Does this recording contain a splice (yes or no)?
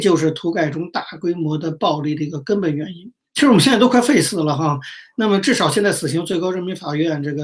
yes